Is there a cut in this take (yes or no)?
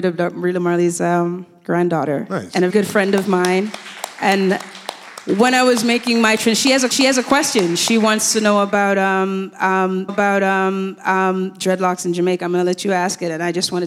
yes